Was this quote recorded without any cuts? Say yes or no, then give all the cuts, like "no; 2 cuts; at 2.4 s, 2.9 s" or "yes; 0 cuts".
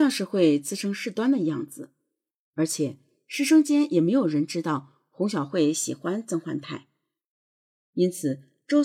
yes; 0 cuts